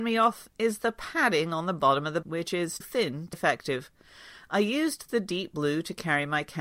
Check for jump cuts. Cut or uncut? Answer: cut